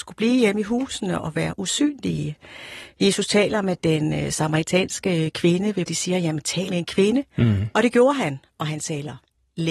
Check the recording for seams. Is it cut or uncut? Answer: cut